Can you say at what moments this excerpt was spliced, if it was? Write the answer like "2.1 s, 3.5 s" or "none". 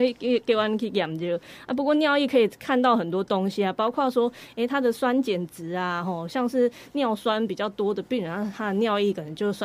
none

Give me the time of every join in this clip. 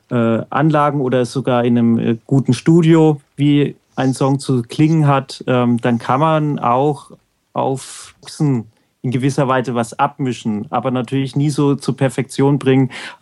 none

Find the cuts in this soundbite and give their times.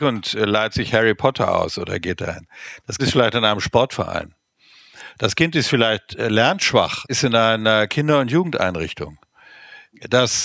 3.0 s, 7.0 s

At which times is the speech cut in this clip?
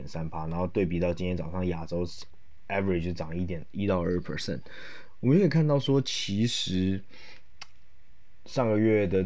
none

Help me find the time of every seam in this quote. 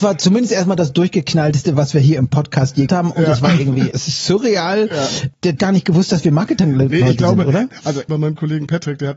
2.9 s, 3.9 s, 5.6 s, 8.1 s

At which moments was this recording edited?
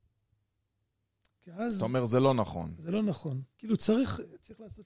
3.5 s

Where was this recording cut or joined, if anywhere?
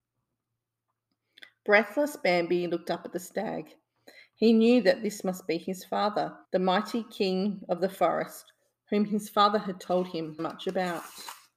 6.4 s, 10.4 s

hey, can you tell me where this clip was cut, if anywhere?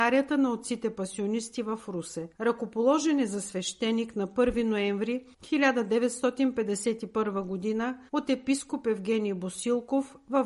2.3 s, 5.3 s, 8.1 s

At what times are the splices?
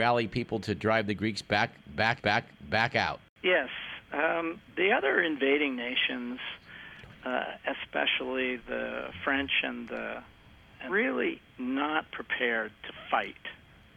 2.2 s, 8.6 s, 10.9 s

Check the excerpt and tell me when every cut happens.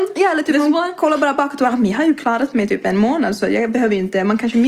none

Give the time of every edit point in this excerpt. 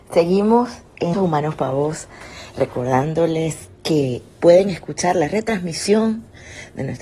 1.1 s

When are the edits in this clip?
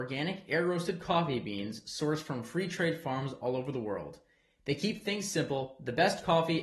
none

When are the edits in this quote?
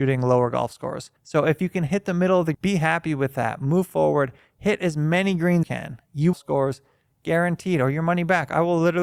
1.2 s, 2.5 s, 5.6 s, 6.3 s

